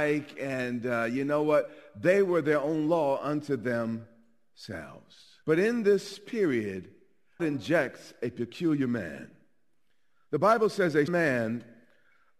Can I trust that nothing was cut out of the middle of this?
no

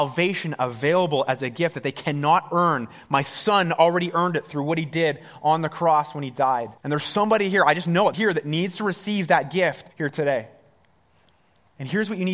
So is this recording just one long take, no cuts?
no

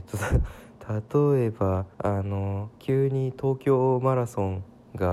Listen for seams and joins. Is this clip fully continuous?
no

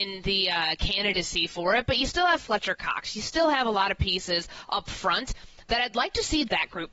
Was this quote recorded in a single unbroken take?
yes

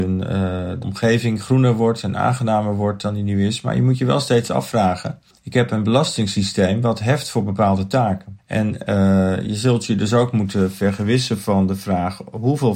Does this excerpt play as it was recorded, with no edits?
yes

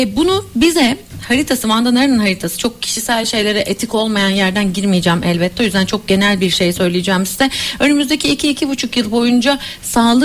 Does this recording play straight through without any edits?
yes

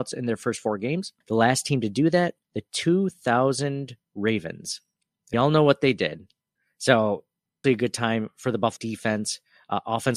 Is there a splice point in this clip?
yes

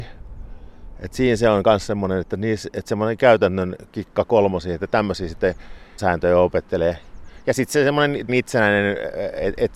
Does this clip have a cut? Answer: yes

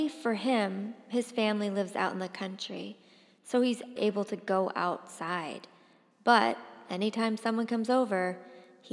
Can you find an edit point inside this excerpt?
yes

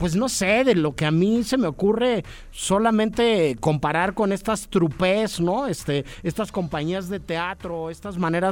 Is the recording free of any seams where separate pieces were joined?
yes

